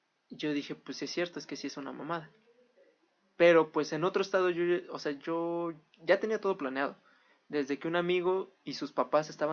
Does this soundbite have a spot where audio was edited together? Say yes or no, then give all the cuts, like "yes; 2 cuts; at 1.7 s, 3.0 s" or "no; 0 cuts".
no; 0 cuts